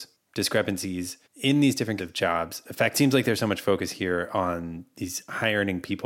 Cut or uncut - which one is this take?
cut